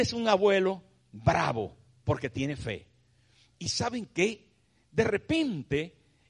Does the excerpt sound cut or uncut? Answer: uncut